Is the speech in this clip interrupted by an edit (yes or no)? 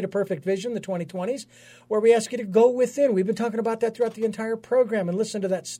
no